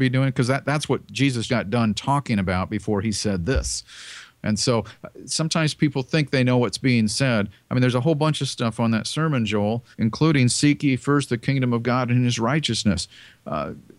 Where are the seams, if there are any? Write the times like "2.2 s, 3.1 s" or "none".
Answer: 1.5 s, 9.9 s

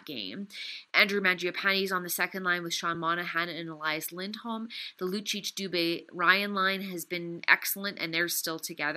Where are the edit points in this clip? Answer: none

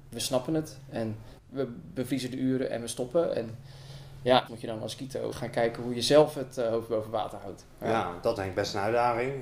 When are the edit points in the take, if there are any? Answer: 1.4 s, 4.5 s, 5.3 s, 8.4 s

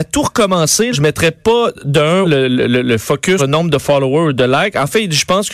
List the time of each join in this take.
0.9 s, 2.2 s, 3.4 s

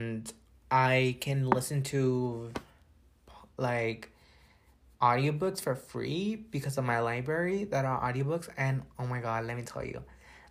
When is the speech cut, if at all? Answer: none

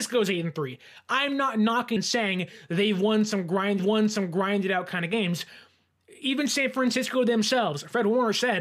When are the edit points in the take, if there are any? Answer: 2.0 s, 3.8 s

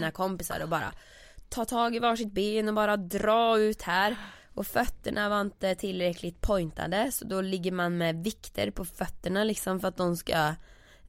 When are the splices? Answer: none

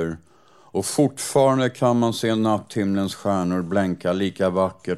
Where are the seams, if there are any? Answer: none

